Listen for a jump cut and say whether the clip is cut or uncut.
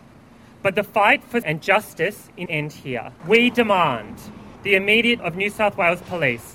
cut